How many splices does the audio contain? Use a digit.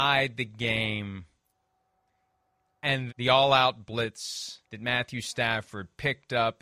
2